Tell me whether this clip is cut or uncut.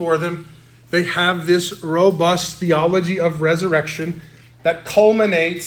uncut